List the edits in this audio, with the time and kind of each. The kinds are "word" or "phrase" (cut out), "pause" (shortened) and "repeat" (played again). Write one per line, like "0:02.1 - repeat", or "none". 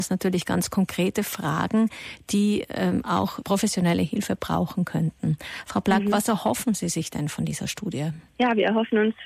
0:03.4 - word
0:08.3 - pause